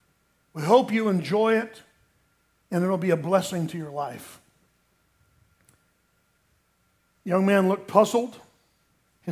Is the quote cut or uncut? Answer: uncut